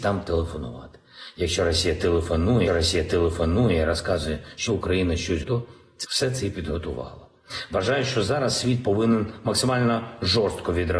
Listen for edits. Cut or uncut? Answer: cut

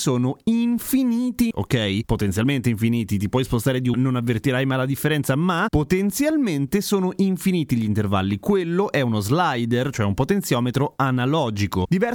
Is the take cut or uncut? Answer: cut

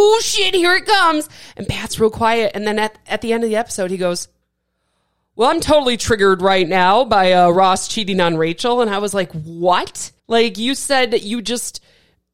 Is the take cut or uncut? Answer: cut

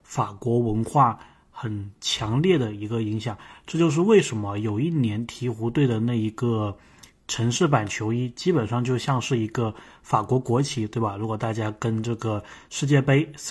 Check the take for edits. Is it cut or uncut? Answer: uncut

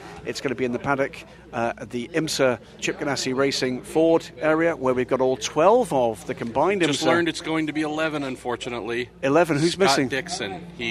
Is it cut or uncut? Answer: cut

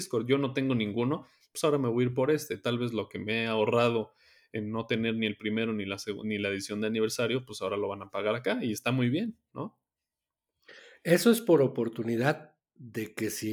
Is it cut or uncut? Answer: uncut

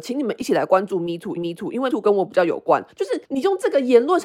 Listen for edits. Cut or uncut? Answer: cut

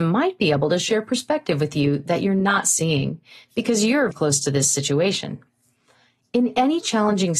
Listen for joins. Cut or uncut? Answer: cut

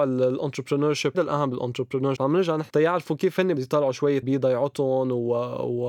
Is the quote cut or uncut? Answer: cut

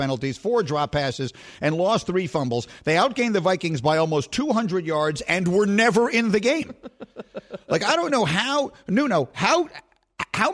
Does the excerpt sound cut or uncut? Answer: uncut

